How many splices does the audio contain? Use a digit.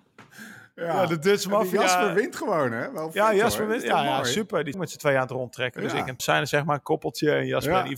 2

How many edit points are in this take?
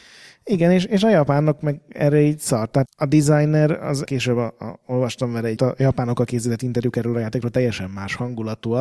3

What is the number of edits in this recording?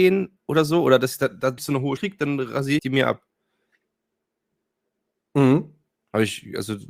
3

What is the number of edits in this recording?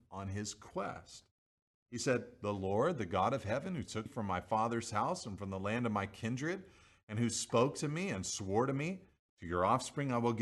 1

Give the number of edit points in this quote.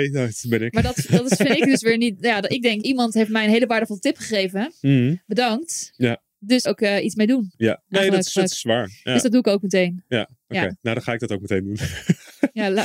3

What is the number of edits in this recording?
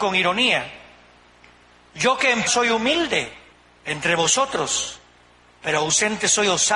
2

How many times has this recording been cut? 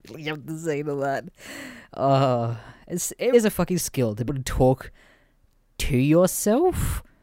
3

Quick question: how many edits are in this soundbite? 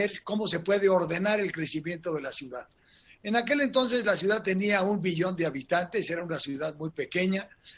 0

